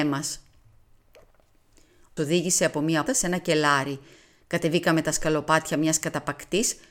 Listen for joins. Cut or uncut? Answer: cut